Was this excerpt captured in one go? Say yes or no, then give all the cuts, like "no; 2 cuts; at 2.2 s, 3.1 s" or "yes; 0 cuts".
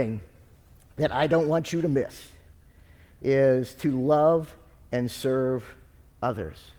yes; 0 cuts